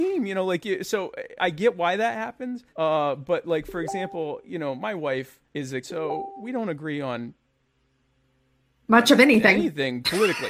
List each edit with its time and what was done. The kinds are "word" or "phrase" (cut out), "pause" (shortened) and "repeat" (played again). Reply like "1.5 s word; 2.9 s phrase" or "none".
1.4 s word; 2.7 s pause; 5.5 s pause; 5.8 s phrase